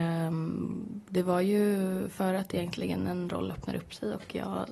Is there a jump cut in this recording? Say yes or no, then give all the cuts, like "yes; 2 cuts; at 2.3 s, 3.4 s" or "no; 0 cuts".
no; 0 cuts